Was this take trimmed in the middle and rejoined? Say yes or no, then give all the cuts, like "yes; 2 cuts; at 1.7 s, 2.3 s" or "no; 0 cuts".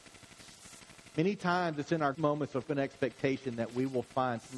yes; 2 cuts; at 2.1 s, 2.6 s